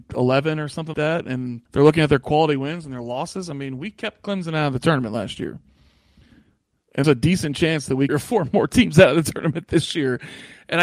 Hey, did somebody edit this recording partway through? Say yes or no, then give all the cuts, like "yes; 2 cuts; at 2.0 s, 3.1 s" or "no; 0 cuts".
yes; 4 cuts; at 0.9 s, 1.7 s, 7.0 s, 8.1 s